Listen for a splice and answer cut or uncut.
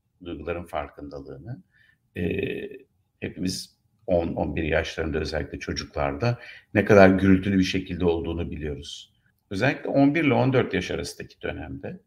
uncut